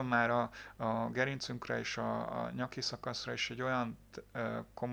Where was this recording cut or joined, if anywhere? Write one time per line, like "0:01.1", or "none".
none